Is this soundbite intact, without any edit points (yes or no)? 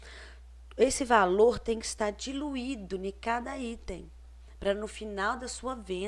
yes